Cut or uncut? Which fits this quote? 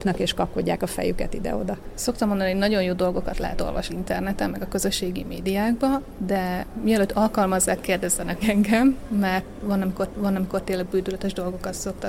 cut